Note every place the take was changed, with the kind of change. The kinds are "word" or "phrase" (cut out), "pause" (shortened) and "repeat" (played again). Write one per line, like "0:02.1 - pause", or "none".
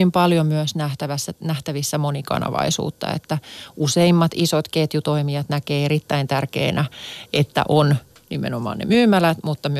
none